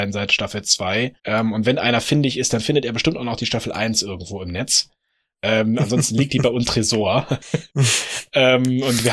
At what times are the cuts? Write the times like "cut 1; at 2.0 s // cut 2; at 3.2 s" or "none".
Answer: cut 1; at 1.2 s // cut 2; at 6.6 s // cut 3; at 7.7 s